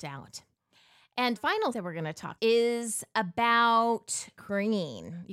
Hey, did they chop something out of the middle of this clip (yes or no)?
yes